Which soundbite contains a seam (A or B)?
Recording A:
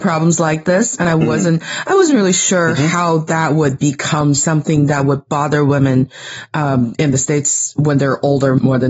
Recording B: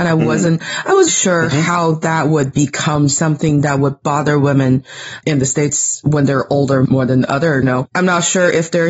B